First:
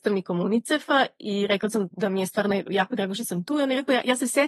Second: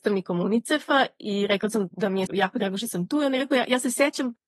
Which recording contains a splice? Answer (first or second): second